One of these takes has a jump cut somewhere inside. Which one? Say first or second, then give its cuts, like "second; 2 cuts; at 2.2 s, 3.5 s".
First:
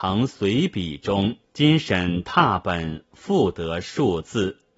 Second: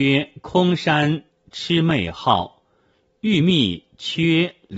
first; 1 cut; at 1.4 s